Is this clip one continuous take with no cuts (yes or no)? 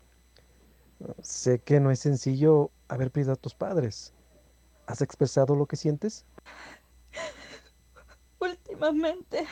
yes